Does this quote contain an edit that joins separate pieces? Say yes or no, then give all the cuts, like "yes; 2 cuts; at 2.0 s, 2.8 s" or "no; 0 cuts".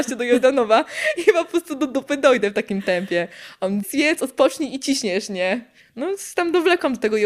yes; 2 cuts; at 3.8 s, 5.8 s